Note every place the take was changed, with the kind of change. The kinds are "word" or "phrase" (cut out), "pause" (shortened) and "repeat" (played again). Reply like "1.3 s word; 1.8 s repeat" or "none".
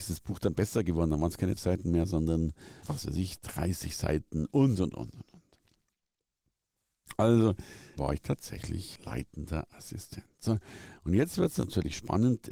1.6 s word; 2.8 s word; 8.0 s word; 8.9 s word